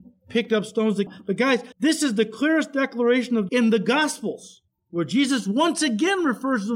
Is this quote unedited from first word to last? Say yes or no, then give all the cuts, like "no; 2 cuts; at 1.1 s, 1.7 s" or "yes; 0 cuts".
no; 4 cuts; at 1.1 s, 1.7 s, 3.5 s, 4.8 s